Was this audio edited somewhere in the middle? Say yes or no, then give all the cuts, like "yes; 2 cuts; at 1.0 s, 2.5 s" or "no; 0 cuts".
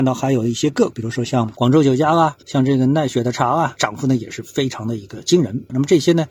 yes; 1 cut; at 2.4 s